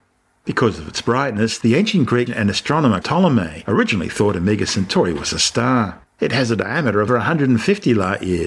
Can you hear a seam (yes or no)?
yes